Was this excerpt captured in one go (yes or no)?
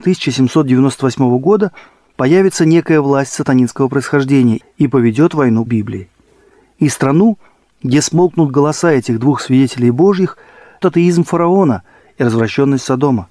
no